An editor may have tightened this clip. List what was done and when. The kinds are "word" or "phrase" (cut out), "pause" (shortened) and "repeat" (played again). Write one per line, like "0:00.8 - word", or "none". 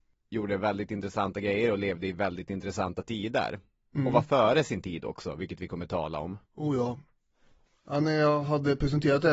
0:06.4 - pause